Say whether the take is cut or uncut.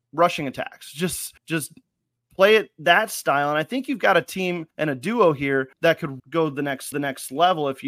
cut